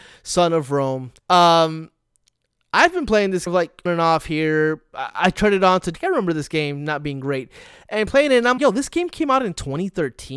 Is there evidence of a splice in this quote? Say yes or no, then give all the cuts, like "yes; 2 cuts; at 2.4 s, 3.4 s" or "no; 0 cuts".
yes; 5 cuts; at 1.2 s, 3.5 s, 3.9 s, 5.9 s, 8.6 s